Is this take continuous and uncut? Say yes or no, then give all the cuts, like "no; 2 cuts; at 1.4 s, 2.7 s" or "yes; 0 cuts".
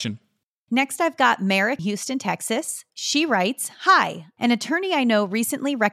no; 2 cuts; at 1.8 s, 2.9 s